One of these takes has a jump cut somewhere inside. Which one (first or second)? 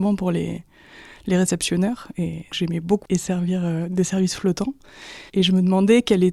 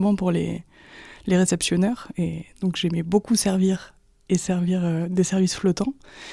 first